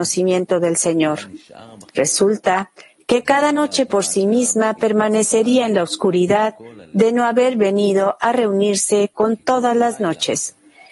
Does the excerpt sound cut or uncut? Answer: cut